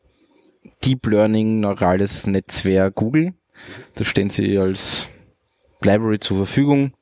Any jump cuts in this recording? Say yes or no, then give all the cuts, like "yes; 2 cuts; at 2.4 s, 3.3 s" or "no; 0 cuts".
yes; 1 cut; at 2.9 s